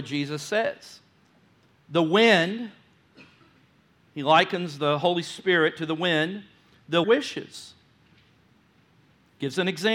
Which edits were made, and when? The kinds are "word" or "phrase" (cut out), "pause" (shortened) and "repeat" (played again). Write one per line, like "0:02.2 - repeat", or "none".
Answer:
0:07.0 - phrase